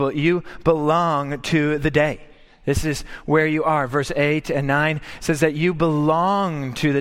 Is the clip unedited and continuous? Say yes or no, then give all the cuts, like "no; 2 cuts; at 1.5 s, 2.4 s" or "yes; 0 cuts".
yes; 0 cuts